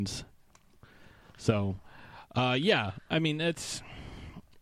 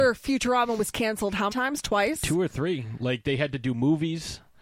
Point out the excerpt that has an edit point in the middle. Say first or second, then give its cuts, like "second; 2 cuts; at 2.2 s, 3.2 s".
second; 1 cut; at 1.5 s